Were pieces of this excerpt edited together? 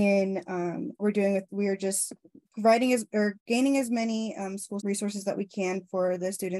yes; 5 cuts; at 1.0 s, 1.5 s, 2.5 s, 3.4 s, 4.8 s

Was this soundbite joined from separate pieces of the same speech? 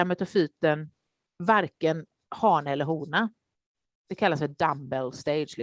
no; 0 cuts

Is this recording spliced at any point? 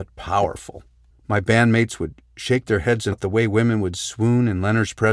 yes; 2 cuts; at 1.1 s, 3.1 s

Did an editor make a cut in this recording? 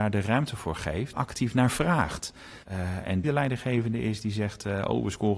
yes; 3 cuts; at 1.1 s, 2.6 s, 3.2 s

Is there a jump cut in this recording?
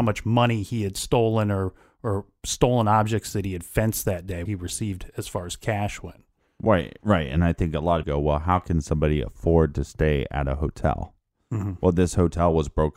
yes; 2 cuts; at 4.5 s, 8.0 s

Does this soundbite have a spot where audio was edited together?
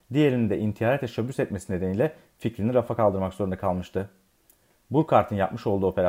no; 0 cuts

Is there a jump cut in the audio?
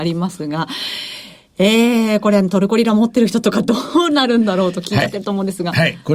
no; 0 cuts

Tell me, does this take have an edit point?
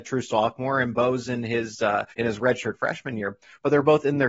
yes; 1 cut; at 2.1 s

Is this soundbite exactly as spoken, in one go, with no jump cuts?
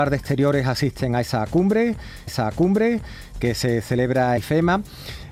no; 2 cuts; at 2.3 s, 4.4 s

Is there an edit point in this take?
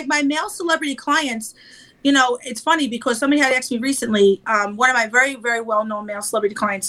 no; 0 cuts

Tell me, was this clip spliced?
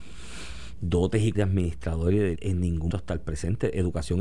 yes; 3 cuts; at 1.3 s, 2.3 s, 2.9 s

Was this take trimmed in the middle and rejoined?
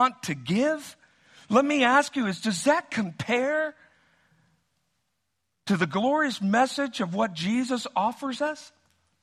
no; 0 cuts

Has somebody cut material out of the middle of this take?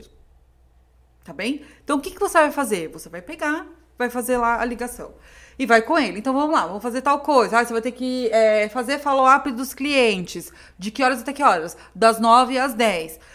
no; 0 cuts

